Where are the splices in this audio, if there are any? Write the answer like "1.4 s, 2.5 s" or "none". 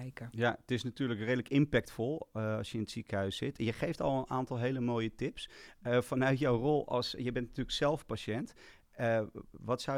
none